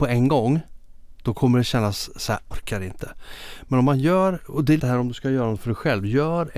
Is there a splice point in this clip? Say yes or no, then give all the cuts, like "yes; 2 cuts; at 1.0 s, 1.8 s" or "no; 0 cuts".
yes; 2 cuts; at 2.5 s, 4.8 s